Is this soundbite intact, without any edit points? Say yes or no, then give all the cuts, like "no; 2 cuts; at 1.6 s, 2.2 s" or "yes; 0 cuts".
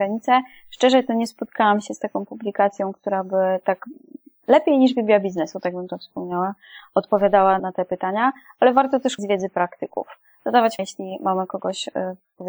no; 3 cuts; at 7.6 s, 9.2 s, 10.8 s